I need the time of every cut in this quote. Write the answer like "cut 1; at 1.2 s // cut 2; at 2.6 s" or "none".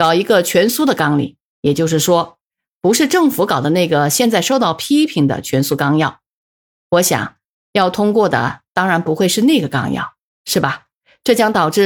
none

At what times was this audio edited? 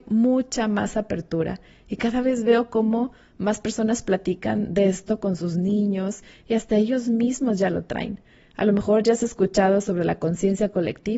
none

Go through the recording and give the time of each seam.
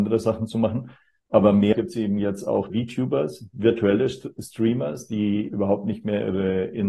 cut 1; at 1.7 s // cut 2; at 2.7 s // cut 3; at 5.5 s

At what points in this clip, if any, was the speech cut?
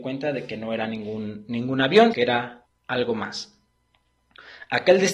cut 1; at 2.1 s // cut 2; at 2.6 s

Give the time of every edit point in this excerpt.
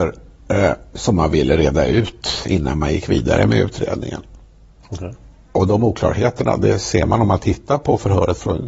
none

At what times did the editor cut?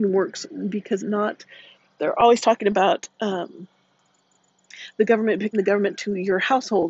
cut 1; at 1.0 s // cut 2; at 2.0 s // cut 3; at 5.5 s

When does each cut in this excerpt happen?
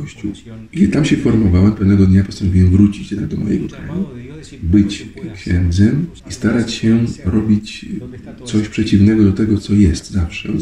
cut 1; at 6.2 s

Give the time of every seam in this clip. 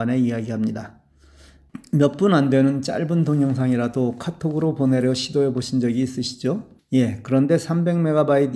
cut 1; at 6.8 s

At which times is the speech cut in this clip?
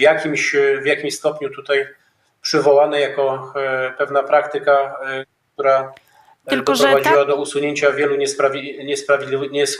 none

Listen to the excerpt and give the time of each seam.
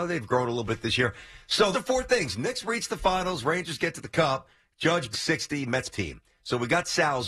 cut 1; at 1.7 s // cut 2; at 5.1 s // cut 3; at 5.9 s

